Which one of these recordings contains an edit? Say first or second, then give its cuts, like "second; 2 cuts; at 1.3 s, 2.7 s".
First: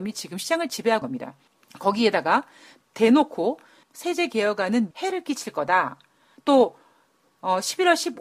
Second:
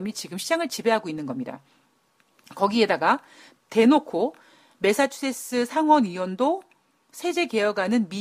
first; 4 cuts; at 1.0 s, 1.5 s, 3.8 s, 4.9 s